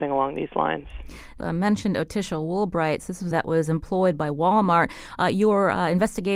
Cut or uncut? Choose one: cut